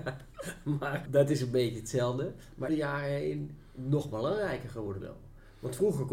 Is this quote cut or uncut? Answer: cut